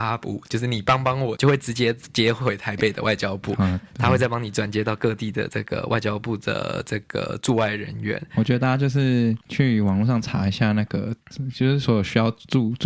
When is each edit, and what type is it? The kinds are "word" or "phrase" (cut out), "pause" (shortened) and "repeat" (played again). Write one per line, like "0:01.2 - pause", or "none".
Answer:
0:01.4 - phrase
0:09.4 - pause